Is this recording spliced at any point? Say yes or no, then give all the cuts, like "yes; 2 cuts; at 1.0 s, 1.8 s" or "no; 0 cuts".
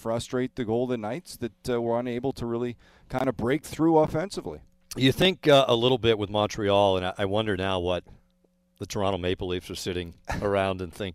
no; 0 cuts